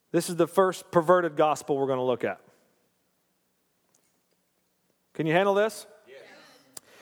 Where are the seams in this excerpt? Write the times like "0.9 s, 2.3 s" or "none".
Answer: none